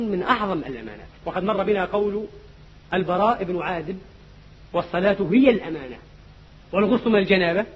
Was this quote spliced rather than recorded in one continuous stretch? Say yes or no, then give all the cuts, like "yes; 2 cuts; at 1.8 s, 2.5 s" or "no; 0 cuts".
yes; 1 cut; at 1.2 s